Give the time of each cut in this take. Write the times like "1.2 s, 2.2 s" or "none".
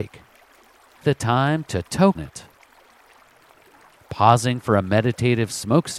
1.0 s, 2.2 s